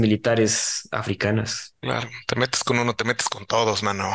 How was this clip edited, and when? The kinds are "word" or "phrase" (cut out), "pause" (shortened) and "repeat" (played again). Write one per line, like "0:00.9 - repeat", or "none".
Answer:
0:01.8 - pause